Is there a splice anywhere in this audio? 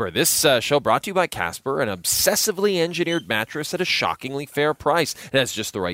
no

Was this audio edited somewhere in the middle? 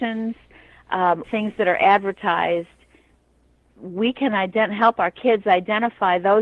yes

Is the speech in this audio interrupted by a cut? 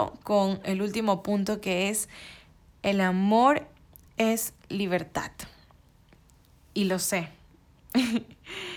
no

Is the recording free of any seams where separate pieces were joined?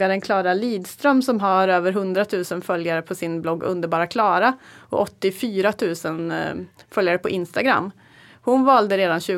yes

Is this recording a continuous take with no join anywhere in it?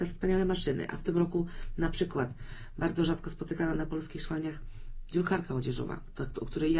yes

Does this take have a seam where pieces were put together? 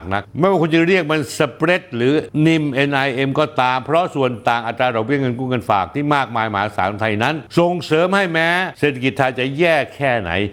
no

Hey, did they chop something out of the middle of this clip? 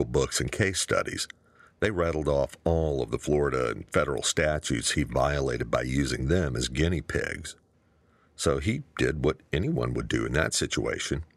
no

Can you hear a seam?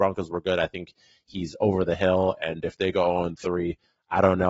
no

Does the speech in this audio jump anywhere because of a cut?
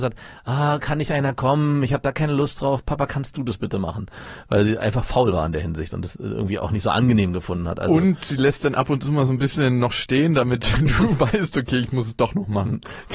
no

